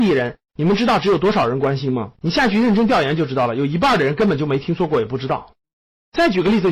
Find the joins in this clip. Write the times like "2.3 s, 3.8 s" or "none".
2.2 s